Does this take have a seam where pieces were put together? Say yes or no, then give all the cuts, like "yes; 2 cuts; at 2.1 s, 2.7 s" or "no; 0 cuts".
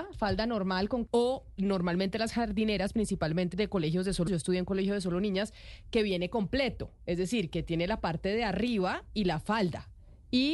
yes; 3 cuts; at 1.1 s, 3.5 s, 4.3 s